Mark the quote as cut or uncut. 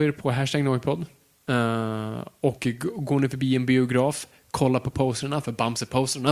uncut